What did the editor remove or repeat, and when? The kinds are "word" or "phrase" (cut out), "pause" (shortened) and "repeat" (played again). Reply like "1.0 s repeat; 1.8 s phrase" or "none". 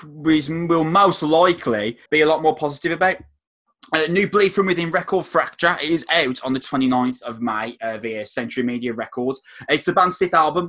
2.1 s pause